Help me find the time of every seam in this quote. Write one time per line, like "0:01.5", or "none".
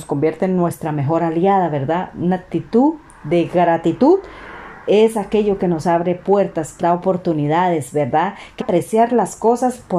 0:06.8
0:08.6